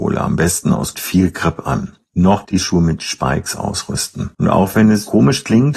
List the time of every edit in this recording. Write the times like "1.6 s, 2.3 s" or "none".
0.9 s, 2.4 s, 4.3 s